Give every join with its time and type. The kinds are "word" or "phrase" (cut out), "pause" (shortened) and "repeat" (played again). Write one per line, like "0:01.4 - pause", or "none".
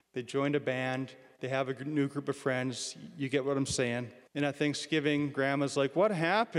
0:04.3 - pause

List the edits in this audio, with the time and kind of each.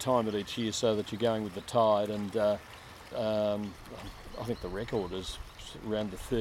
0:03.1 - word

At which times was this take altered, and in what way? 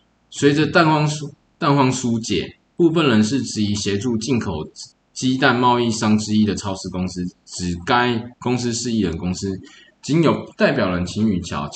0:04.9 - pause
0:08.3 - pause

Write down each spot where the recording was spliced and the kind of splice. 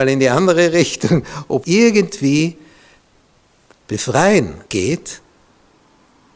0:01.6 - word
0:03.7 - word
0:04.7 - pause

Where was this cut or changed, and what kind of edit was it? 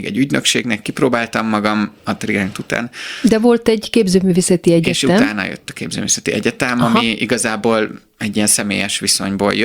none

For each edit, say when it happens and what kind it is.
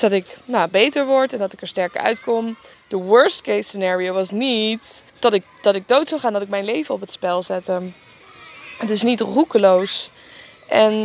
0:02.7 - pause
0:05.1 - pause

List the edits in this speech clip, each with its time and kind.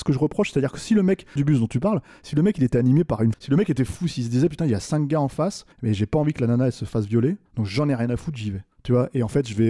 0:01.4 - phrase
0:03.3 - word
0:05.7 - pause
0:07.5 - pause
0:08.7 - pause

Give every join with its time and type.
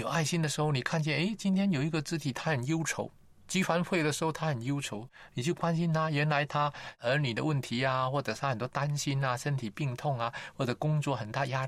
0:03.2 - pause

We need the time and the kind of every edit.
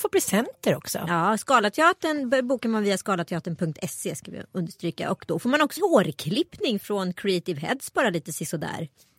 0:05.8 - phrase

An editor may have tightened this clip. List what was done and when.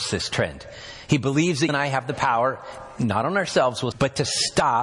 0:01.7 - word
0:03.9 - word

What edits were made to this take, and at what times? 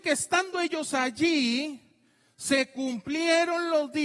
none

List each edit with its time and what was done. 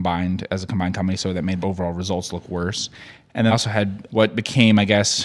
0:01.6 - word
0:03.5 - word
0:04.1 - word

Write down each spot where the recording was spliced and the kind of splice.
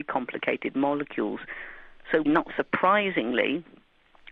0:02.3 - word

